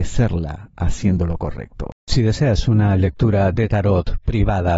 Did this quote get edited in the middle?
no; 0 cuts

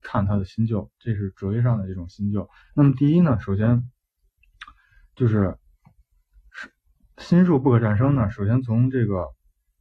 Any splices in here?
yes; 1 cut; at 2.6 s

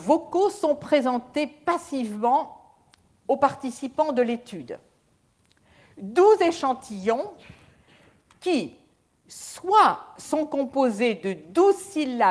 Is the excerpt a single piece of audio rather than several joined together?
yes; 0 cuts

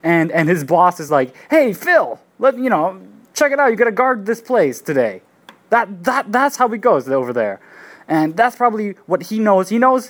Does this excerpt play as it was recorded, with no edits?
yes; 0 cuts

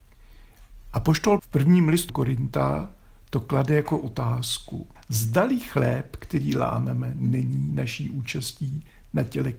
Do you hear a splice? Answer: yes; 3 cuts; at 1.4 s, 2.1 s, 5.0 s

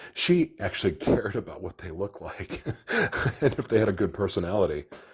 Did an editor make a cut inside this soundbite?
no; 0 cuts

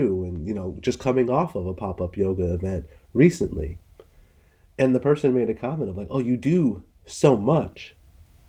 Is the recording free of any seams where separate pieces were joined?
yes; 0 cuts

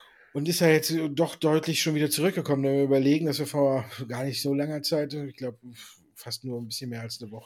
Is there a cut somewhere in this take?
no; 0 cuts

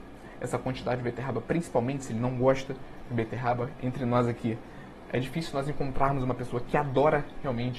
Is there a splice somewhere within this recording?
no; 0 cuts

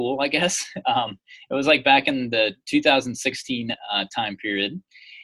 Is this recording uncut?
yes; 0 cuts

